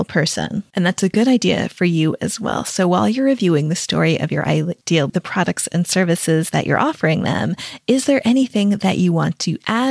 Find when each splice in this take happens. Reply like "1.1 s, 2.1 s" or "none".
5.1 s